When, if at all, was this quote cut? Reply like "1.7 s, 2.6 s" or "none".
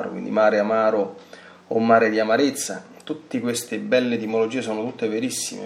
none